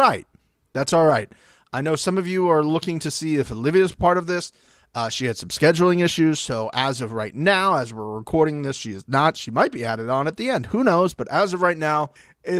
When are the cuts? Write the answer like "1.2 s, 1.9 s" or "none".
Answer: none